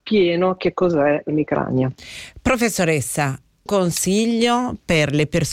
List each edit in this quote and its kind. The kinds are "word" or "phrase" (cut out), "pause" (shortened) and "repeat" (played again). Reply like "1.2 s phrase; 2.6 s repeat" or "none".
1.3 s word; 3.7 s word

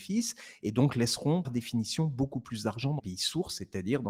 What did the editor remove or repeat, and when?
1.4 s word; 3.0 s word

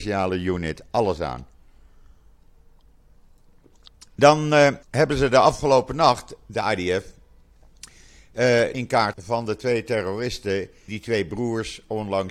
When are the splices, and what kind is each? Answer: 4.1 s pause; 4.8 s pause; 8.7 s phrase; 9.1 s word; 10.9 s word

